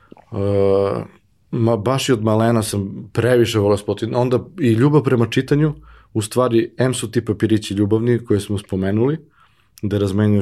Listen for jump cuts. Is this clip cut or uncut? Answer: uncut